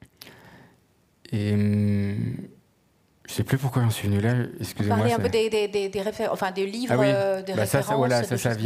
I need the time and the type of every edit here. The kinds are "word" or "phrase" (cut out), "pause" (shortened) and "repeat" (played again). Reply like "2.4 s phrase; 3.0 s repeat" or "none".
none

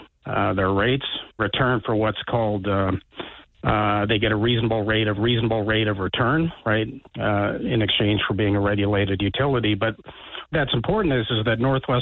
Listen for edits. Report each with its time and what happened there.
1.4 s phrase; 5.2 s repeat; 7.1 s pause; 10.5 s word

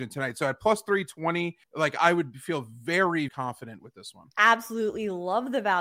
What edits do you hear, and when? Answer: 1.6 s pause; 3.3 s word; 4.3 s pause

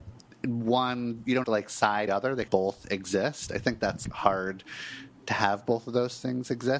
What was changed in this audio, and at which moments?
1.4 s word; 2.1 s phrase; 2.5 s phrase; 4.0 s word

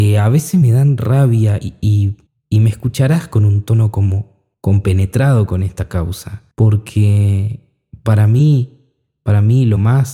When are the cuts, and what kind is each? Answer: 2.3 s pause; 4.5 s pause; 6.5 s pause

